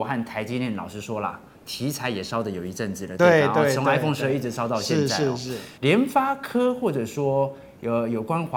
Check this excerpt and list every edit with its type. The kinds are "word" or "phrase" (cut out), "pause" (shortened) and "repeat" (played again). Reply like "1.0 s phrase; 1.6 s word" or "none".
5.8 s pause